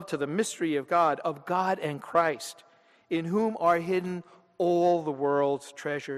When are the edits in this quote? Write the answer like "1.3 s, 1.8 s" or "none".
none